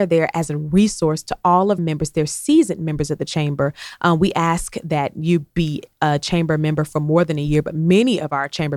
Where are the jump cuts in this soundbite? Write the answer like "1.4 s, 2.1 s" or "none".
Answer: 1.8 s